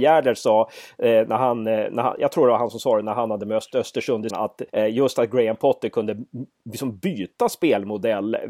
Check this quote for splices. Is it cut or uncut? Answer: cut